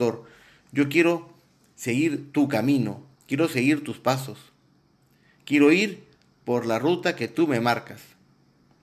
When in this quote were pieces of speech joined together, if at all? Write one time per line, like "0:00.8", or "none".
none